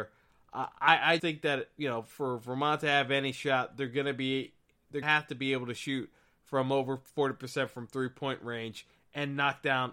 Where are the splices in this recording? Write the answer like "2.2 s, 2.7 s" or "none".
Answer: 1.2 s, 5.0 s